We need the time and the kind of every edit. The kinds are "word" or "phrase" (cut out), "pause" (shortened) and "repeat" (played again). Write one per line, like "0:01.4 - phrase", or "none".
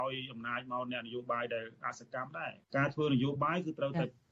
0:02.6 - pause